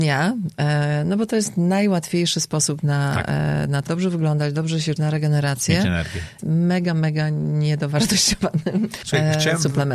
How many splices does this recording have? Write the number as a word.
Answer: two